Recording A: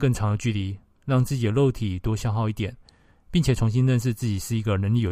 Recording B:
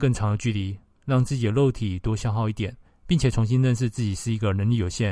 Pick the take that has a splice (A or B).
B